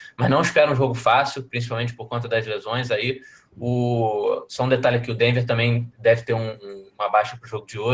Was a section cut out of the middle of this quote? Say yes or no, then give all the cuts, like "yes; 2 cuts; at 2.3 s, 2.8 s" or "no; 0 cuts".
no; 0 cuts